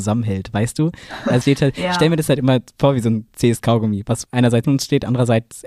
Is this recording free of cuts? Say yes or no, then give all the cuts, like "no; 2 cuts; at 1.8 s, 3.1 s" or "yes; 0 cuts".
no; 2 cuts; at 1.4 s, 4.6 s